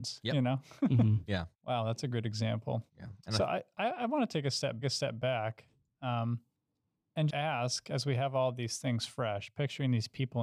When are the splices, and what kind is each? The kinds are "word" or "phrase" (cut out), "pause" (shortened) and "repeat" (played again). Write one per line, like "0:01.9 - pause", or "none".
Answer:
0:01.5 - pause
0:02.9 - pause
0:04.8 - repeat
0:07.3 - word